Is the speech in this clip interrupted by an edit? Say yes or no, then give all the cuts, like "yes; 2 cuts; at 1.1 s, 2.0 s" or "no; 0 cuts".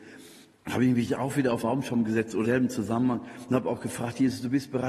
yes; 2 cuts; at 1.6 s, 2.4 s